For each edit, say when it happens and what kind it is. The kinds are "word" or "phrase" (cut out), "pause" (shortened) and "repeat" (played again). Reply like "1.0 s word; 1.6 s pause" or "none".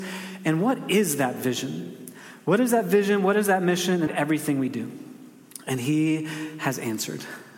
4.1 s phrase